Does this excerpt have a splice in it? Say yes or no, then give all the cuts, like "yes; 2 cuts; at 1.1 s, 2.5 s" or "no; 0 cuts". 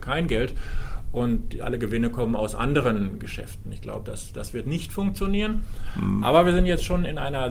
no; 0 cuts